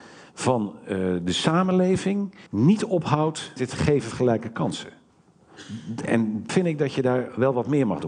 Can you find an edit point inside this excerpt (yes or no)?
yes